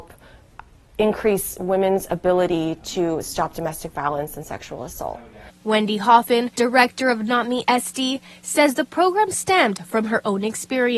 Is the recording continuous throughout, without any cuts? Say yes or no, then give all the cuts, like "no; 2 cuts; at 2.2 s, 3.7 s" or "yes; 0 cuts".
no; 2 cuts; at 5.6 s, 6.6 s